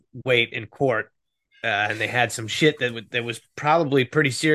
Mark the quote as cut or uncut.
uncut